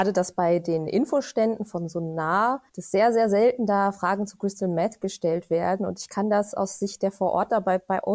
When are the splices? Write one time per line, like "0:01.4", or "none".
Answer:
0:02.7